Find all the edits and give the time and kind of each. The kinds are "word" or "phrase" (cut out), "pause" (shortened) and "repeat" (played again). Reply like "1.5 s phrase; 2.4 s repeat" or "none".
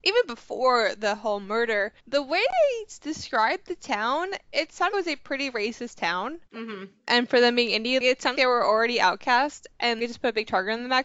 2.0 s pause; 4.9 s word; 6.4 s pause; 8.3 s word; 10.0 s word